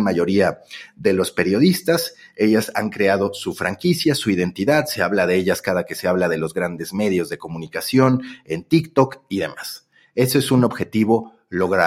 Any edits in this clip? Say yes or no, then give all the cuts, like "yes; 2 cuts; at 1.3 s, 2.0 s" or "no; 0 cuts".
no; 0 cuts